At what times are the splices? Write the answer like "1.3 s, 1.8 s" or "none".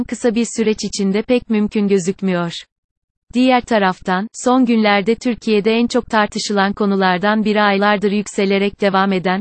none